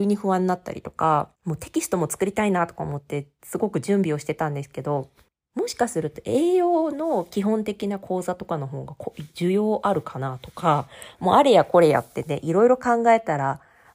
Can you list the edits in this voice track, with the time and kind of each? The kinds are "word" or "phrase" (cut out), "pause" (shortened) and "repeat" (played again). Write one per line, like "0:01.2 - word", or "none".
0:01.4 - pause
0:05.3 - pause